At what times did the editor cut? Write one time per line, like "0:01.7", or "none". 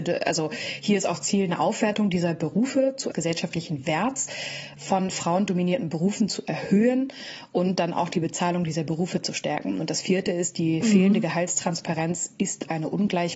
0:03.1
0:10.8